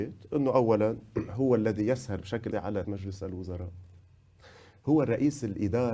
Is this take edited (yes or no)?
yes